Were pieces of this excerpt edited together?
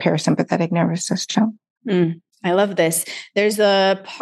no; 0 cuts

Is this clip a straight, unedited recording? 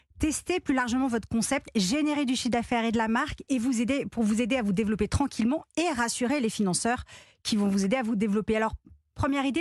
yes; 0 cuts

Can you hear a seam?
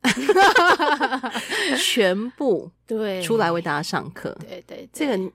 yes; 1 cut; at 2.8 s

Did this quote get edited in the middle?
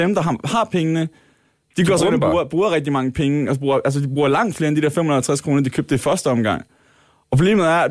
no; 0 cuts

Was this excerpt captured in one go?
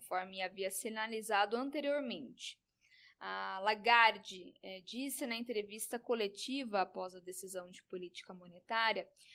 yes; 0 cuts

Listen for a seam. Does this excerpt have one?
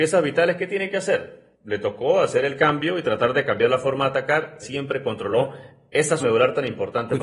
yes; 3 cuts; at 1.5 s, 4.6 s, 6.2 s

